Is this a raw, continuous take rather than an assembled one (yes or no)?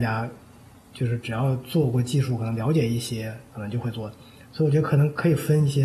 yes